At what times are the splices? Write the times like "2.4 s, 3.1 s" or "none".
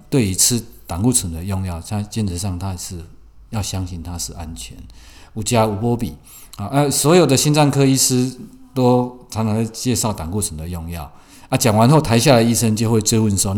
none